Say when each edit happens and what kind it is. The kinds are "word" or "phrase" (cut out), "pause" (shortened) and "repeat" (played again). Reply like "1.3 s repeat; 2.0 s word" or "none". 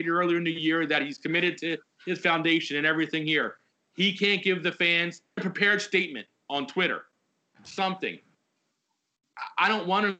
5.4 s word